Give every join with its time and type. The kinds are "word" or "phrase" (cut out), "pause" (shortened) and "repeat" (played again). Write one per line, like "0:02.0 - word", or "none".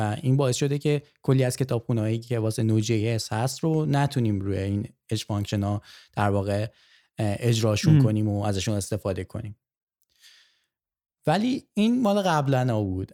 none